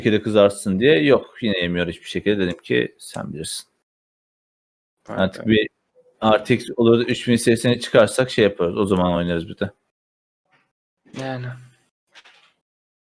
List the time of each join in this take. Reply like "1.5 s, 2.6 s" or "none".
none